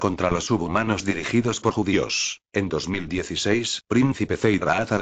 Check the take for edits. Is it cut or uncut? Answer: cut